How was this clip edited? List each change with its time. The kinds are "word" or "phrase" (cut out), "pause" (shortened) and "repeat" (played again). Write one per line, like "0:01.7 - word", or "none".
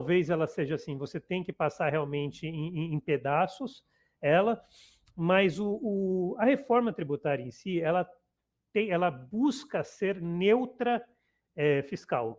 none

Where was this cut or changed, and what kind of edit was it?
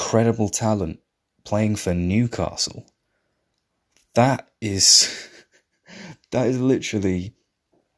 none

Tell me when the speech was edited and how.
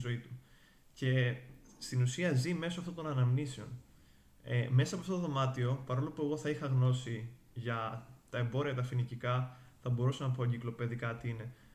none

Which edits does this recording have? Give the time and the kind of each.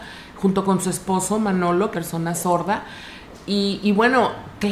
0:01.9 - phrase

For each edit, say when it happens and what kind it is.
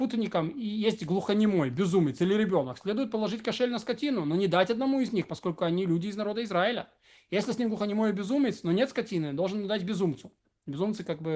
none

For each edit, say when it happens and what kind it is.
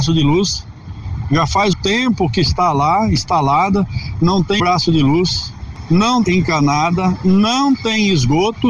0:01.7 - word
0:04.6 - word
0:06.2 - phrase

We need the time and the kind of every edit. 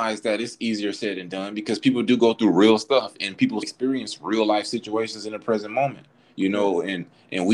0:03.6 - word

